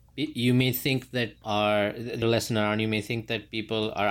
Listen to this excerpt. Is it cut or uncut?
cut